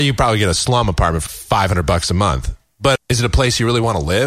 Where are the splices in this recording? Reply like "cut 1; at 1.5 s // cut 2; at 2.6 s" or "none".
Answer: cut 1; at 1.3 s // cut 2; at 3.0 s